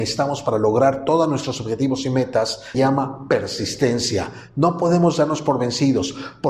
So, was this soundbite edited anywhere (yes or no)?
yes